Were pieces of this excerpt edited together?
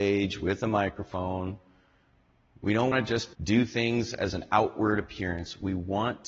yes; 2 cuts; at 2.9 s, 3.3 s

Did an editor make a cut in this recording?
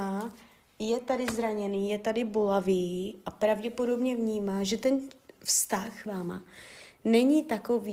yes; 1 cut; at 6.1 s

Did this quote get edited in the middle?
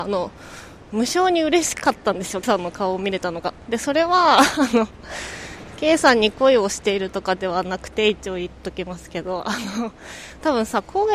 yes; 1 cut; at 2.4 s

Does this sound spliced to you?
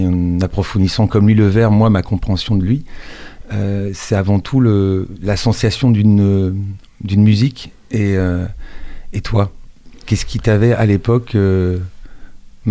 no; 0 cuts

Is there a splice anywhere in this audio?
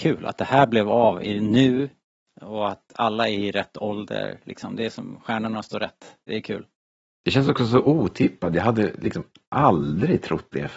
no; 0 cuts

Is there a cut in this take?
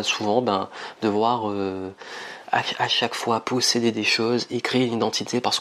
no; 0 cuts

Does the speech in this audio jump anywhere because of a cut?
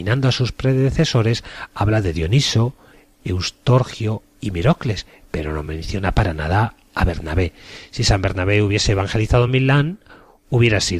no; 0 cuts

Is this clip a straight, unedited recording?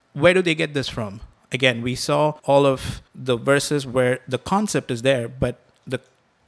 no; 2 cuts; at 2.4 s, 3.1 s

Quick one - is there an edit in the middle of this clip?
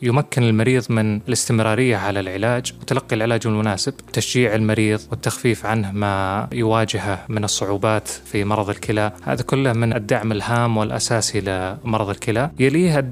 no; 0 cuts

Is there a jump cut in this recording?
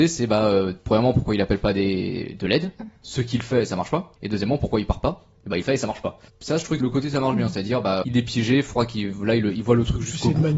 yes; 6 cuts; at 3.0 s, 4.2 s, 5.6 s, 6.3 s, 6.8 s, 8.0 s

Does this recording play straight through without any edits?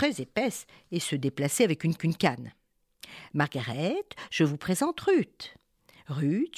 no; 1 cut; at 2.0 s

